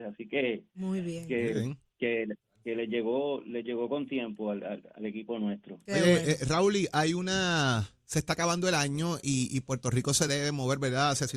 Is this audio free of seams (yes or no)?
yes